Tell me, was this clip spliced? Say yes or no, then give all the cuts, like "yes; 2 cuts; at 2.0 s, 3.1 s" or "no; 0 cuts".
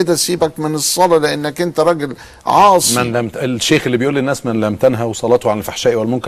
no; 0 cuts